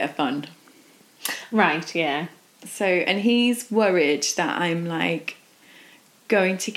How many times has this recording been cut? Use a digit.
0